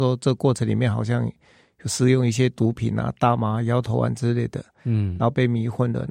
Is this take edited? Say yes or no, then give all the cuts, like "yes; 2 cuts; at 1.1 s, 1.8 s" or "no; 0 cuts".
no; 0 cuts